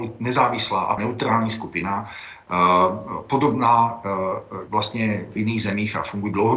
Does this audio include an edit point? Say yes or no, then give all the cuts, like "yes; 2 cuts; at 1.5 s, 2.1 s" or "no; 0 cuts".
yes; 3 cuts; at 1.0 s, 4.7 s, 5.4 s